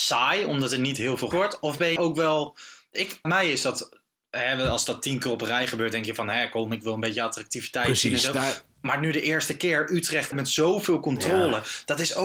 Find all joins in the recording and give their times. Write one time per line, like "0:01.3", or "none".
0:01.3
0:02.0
0:03.2
0:10.3